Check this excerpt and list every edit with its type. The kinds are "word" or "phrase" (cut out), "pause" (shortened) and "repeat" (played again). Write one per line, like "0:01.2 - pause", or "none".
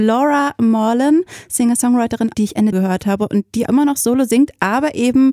0:02.3 - phrase
0:02.7 - phrase
0:03.7 - word